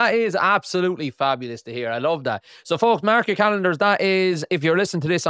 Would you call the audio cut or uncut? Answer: uncut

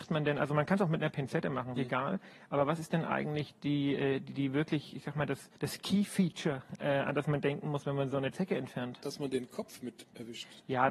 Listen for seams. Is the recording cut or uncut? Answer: cut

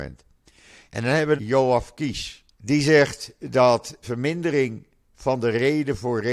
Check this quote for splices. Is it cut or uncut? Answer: cut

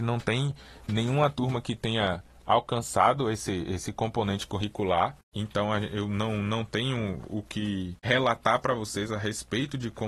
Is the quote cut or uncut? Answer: uncut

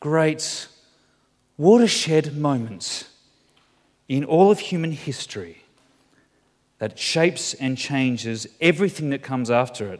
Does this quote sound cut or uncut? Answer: uncut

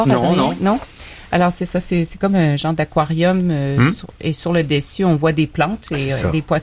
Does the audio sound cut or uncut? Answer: uncut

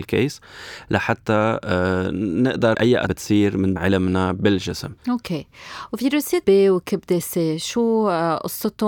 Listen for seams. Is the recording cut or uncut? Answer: cut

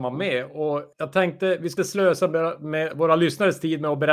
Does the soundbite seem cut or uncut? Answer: cut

